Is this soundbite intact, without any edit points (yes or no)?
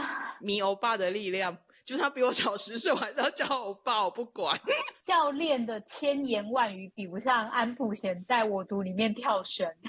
yes